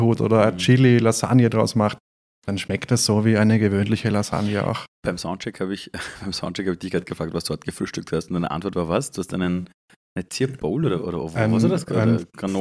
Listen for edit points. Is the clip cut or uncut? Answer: uncut